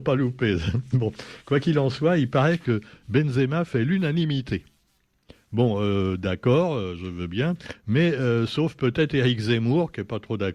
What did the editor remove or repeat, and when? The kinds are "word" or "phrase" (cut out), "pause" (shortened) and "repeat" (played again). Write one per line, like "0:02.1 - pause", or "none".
none